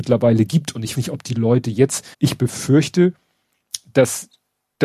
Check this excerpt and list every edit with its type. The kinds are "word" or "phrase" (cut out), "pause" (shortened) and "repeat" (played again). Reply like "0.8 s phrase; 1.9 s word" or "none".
0.9 s word; 2.1 s pause